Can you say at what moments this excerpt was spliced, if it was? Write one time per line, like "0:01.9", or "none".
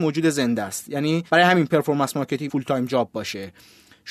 0:01.3
0:02.5